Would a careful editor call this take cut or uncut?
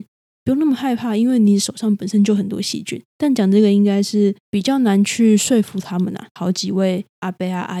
cut